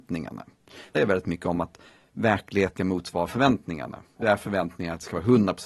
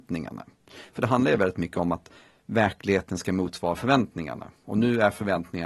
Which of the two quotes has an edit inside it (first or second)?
first